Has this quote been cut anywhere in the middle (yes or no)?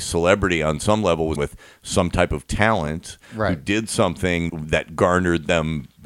yes